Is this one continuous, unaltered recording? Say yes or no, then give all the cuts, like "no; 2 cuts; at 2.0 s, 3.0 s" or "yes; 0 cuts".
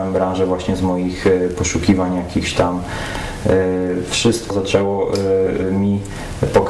no; 1 cut; at 4.5 s